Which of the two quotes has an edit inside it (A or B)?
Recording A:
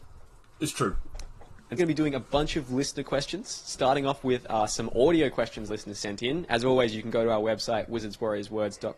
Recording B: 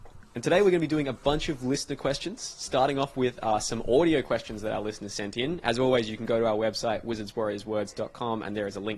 A